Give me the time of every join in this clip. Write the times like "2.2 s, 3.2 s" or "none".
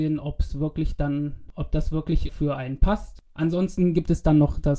2.3 s